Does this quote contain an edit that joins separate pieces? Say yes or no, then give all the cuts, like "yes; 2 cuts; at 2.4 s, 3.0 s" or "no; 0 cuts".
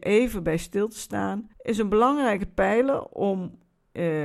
yes; 1 cut; at 1.5 s